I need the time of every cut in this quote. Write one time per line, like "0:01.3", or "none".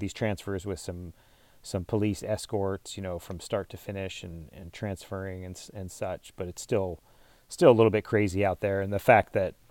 none